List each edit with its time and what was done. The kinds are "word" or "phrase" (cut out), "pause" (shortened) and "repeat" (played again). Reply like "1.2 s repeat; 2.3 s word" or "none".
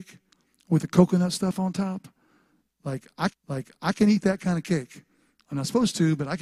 3.3 s repeat